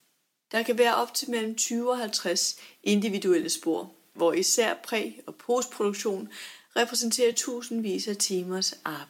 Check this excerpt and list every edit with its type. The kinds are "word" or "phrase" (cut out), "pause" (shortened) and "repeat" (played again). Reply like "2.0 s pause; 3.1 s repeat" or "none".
none